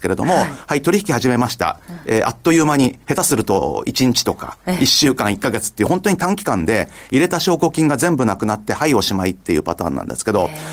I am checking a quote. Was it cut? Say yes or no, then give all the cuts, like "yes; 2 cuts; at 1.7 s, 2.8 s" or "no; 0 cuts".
no; 0 cuts